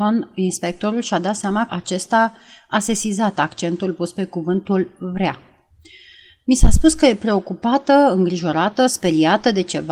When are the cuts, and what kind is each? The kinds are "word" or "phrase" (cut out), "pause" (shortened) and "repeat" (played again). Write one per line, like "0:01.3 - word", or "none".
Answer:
0:01.7 - word